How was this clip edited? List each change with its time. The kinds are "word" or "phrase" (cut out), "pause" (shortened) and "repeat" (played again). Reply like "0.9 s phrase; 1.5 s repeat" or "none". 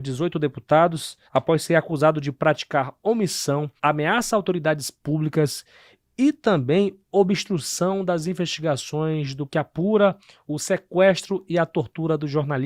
1.3 s pause; 3.8 s pause; 9.5 s word